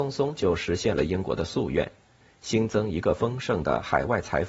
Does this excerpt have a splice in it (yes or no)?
no